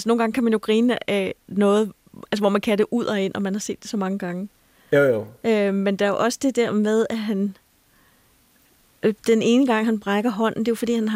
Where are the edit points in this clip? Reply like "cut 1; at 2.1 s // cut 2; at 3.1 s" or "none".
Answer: none